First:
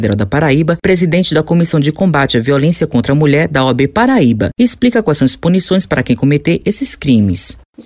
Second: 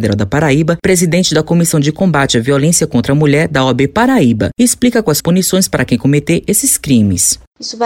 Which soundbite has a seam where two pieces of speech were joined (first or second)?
second